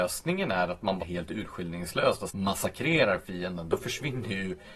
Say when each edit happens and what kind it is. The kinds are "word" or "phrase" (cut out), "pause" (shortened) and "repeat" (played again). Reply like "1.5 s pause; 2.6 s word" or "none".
1.0 s word; 2.3 s word